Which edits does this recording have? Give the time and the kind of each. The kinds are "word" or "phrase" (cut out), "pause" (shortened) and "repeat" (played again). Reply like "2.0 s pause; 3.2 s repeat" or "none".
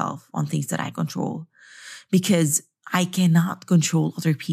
0.9 s word

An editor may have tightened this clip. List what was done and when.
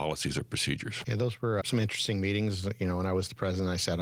1.6 s word

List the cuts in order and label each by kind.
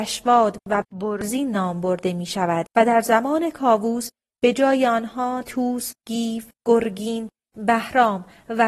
2.7 s pause; 5.4 s word; 6.0 s word; 6.5 s pause

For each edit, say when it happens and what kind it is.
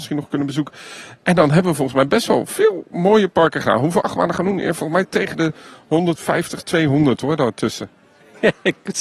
none

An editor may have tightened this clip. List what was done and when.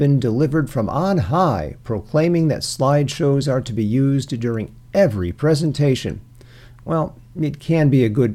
none

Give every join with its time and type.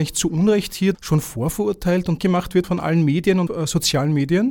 0.9 s word; 2.2 s phrase; 2.6 s word; 3.5 s word

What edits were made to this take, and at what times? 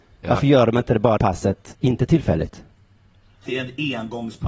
1.2 s word; 3.5 s word

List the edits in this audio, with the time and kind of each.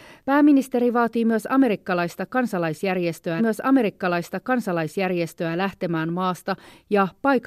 3.4 s repeat

